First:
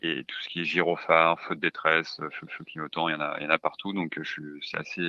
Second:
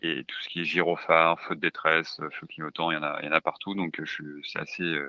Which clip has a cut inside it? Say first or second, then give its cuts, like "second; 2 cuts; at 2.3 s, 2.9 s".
first; 1 cut; at 2.5 s